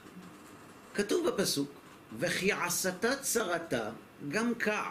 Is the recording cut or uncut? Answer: uncut